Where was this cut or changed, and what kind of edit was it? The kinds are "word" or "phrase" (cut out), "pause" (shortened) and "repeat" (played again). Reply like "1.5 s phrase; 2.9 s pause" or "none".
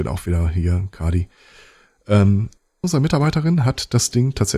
2.8 s word